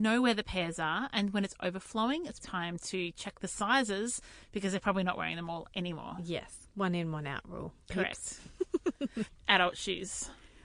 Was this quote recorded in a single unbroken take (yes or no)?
no